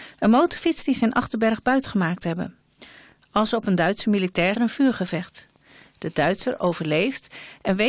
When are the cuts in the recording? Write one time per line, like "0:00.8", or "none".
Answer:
0:04.5